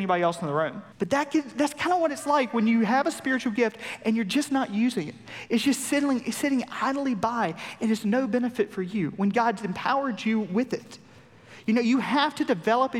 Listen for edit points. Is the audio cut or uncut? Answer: cut